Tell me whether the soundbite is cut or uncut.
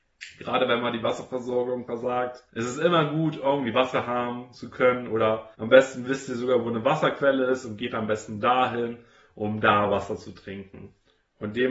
cut